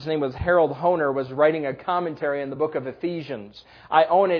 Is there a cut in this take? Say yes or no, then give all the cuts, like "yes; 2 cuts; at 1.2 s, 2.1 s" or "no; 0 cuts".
no; 0 cuts